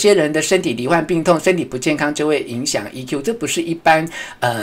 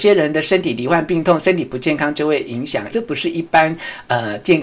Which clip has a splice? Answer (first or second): second